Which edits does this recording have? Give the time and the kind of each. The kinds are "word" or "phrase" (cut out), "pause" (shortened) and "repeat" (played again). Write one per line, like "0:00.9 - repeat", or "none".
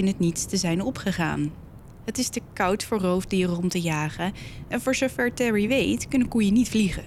none